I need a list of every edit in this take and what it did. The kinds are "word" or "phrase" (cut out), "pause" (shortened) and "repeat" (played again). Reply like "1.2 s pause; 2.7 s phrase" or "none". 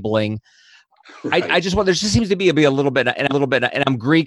3.3 s repeat